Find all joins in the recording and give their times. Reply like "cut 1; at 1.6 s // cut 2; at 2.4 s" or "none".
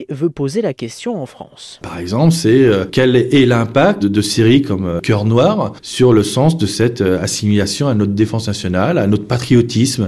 cut 1; at 4.0 s